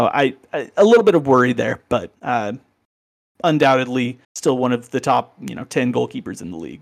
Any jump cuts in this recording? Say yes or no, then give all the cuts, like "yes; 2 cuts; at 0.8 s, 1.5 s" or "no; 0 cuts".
yes; 2 cuts; at 2.2 s, 4.2 s